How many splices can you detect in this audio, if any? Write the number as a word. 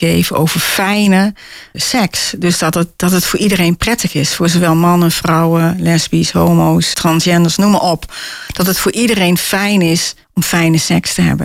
three